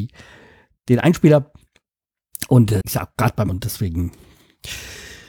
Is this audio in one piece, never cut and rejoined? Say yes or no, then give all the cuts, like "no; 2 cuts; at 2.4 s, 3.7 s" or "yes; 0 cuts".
no; 2 cuts; at 2.8 s, 3.5 s